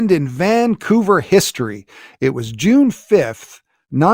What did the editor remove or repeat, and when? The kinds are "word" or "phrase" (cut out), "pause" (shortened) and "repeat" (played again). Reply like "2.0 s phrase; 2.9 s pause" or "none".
none